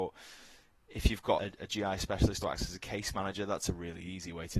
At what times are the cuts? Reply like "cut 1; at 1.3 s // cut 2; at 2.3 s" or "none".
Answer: cut 1; at 1.4 s // cut 2; at 2.4 s